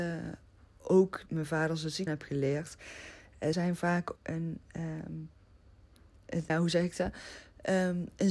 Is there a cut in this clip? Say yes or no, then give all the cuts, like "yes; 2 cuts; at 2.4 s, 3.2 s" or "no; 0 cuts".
yes; 5 cuts; at 1.3 s, 2.1 s, 3.5 s, 4.2 s, 6.5 s